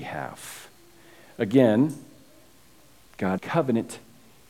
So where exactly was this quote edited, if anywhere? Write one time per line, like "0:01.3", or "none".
0:03.4